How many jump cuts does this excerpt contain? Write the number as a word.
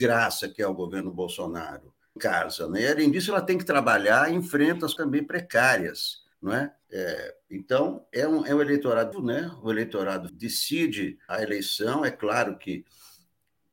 eight